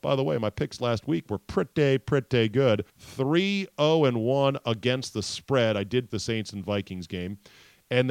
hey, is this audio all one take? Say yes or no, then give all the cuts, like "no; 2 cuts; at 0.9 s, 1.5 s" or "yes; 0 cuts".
no; 2 cuts; at 2.9 s, 6.1 s